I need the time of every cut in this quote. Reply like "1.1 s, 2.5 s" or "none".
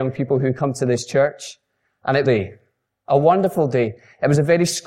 2.2 s